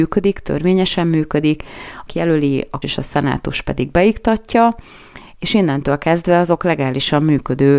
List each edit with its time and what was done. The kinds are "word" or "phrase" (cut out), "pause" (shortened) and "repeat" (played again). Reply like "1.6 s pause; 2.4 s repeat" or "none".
2.1 s phrase; 2.8 s word